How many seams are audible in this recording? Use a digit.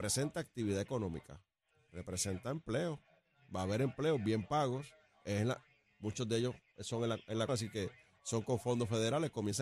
1